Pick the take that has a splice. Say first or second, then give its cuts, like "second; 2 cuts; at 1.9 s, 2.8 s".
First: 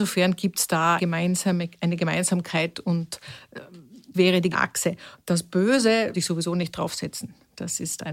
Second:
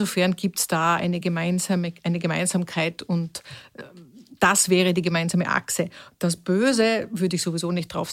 first; 4 cuts; at 1.0 s, 4.1 s, 4.5 s, 6.1 s